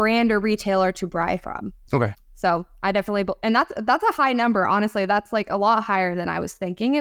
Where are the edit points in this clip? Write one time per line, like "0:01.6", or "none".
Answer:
0:01.8